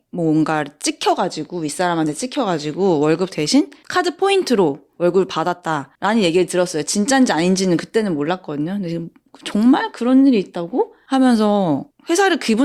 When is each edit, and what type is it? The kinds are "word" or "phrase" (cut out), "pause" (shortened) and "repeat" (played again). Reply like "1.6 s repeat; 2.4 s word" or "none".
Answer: none